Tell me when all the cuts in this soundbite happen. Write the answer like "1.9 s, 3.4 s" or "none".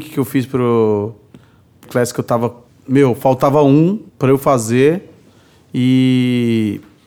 1.9 s, 2.7 s, 4.1 s